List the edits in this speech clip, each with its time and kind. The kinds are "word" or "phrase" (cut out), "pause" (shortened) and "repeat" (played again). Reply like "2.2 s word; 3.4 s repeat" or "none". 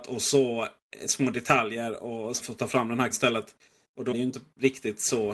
2.4 s word; 3.1 s word; 4.1 s word